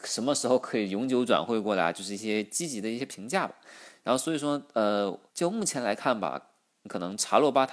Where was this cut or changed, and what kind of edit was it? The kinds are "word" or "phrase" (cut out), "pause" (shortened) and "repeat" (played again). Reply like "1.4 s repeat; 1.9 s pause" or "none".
5.3 s pause